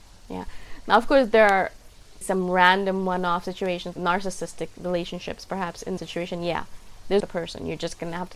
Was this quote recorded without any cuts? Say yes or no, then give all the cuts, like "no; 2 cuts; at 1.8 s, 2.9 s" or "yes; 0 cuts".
no; 4 cuts; at 2.2 s, 3.9 s, 6.0 s, 7.2 s